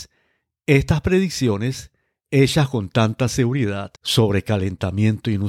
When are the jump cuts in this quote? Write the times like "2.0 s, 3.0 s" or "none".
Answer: 4.0 s

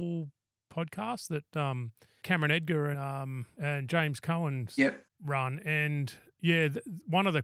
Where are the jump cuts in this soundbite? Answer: 2.9 s

